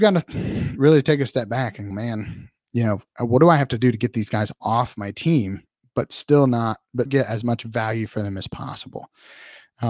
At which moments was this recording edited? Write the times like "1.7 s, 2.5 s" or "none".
1.9 s, 7.1 s